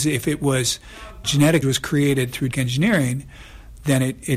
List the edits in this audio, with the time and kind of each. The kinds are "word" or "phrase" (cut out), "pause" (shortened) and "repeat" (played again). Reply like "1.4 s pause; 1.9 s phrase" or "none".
1.2 s word; 1.6 s word; 2.5 s word